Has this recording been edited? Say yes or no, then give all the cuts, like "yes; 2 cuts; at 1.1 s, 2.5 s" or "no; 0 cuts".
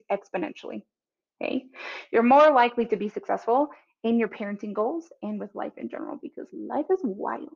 no; 0 cuts